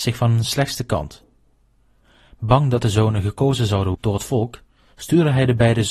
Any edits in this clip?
yes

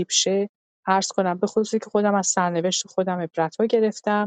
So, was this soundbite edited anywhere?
no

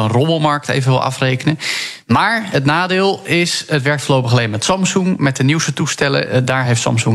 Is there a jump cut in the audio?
no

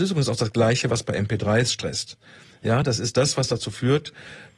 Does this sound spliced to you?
no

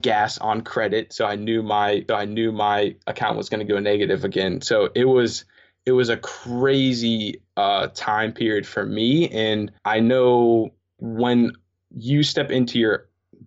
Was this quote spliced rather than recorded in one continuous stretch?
yes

